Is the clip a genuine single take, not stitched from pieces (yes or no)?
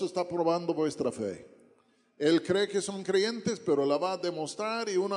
yes